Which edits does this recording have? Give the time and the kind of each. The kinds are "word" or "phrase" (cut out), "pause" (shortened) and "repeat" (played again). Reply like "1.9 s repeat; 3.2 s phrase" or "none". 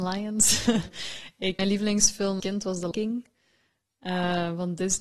1.6 s word; 2.4 s word; 2.9 s word